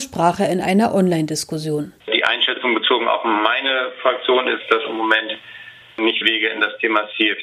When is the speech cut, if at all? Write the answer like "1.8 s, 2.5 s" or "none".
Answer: 2.0 s, 6.2 s